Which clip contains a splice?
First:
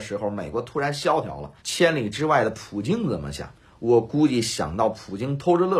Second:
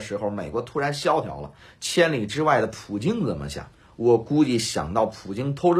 first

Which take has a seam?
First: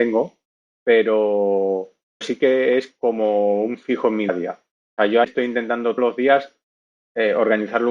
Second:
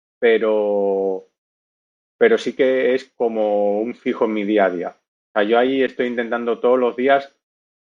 first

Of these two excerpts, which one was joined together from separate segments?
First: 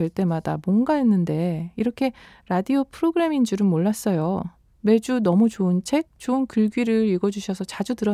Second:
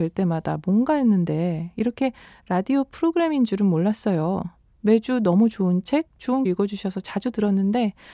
second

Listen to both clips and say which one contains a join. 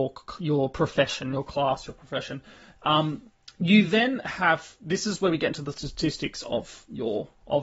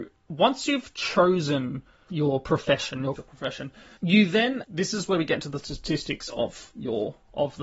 second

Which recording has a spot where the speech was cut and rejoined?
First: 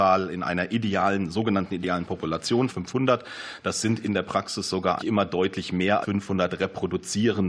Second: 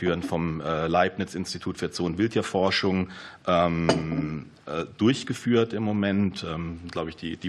first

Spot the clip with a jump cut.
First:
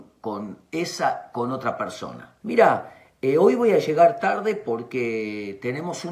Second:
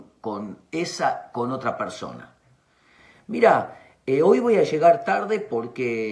first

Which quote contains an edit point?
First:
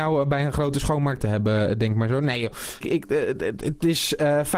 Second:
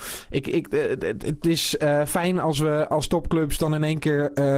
first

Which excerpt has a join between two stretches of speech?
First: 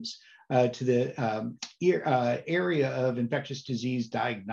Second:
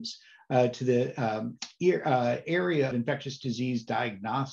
second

